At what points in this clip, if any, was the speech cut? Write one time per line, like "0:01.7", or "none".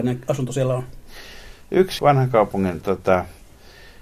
0:02.0
0:02.8